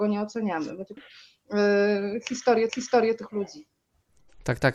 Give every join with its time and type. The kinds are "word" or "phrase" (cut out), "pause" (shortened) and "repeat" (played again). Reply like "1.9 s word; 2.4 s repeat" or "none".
1.0 s word; 2.7 s repeat